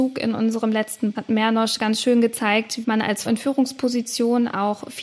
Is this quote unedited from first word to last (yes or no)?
no